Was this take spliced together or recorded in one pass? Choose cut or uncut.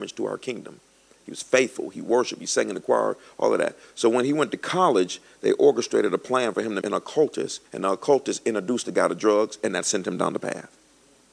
cut